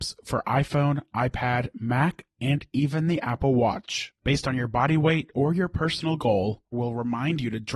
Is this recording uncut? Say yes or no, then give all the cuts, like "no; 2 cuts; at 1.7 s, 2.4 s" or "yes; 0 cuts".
no; 2 cuts; at 4.2 s, 6.7 s